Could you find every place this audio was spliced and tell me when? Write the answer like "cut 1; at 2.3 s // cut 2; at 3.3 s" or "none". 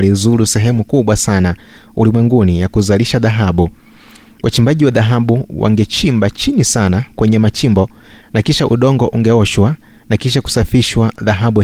none